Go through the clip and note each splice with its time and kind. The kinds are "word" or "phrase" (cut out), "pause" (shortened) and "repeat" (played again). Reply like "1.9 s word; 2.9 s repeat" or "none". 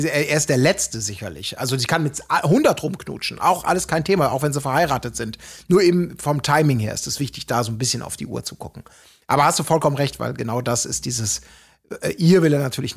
none